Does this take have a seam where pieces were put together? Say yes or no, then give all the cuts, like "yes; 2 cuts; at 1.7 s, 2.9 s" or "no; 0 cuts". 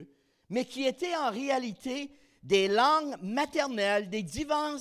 no; 0 cuts